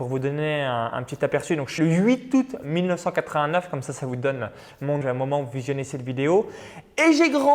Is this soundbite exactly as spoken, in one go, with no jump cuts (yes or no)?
no